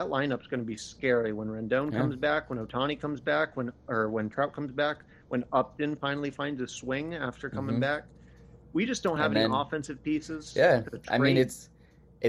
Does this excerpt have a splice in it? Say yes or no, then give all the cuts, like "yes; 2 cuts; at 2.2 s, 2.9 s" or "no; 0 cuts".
no; 0 cuts